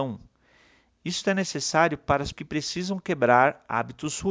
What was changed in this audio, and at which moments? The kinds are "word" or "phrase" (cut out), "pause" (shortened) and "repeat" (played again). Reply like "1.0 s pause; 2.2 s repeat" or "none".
2.3 s word